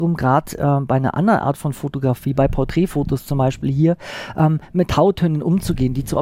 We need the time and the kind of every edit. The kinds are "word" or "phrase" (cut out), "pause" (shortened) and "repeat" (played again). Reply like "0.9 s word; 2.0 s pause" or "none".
none